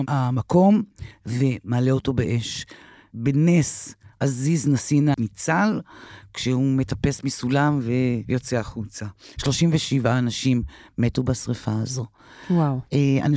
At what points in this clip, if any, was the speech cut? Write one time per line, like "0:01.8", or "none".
0:05.1